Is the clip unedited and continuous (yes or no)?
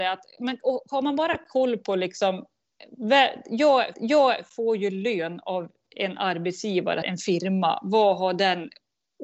no